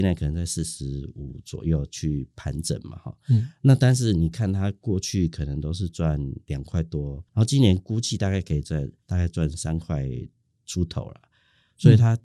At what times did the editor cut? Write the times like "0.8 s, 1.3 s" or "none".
7.3 s, 9.0 s